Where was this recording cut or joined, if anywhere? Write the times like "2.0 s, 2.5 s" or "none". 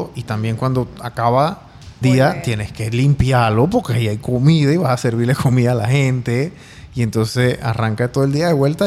2.0 s

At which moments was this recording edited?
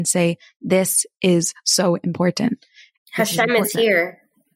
none

